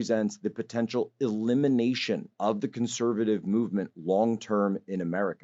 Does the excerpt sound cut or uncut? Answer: cut